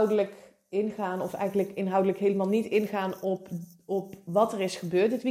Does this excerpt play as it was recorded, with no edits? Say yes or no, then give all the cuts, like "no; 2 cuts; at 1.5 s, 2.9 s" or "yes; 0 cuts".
yes; 0 cuts